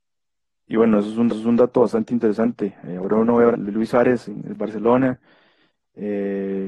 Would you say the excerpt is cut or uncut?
cut